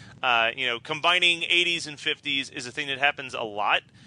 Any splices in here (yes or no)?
no